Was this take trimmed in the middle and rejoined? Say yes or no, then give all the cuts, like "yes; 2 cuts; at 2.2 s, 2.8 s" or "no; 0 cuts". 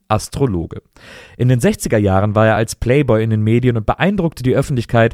no; 0 cuts